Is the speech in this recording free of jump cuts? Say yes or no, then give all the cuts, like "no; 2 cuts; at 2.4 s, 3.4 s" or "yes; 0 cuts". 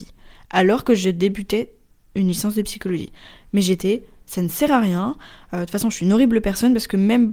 yes; 0 cuts